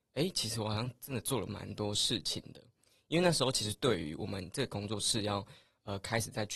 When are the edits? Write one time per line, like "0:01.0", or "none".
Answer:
none